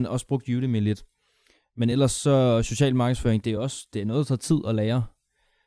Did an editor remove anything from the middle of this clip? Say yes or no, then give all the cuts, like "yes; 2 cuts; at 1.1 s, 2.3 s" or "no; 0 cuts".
no; 0 cuts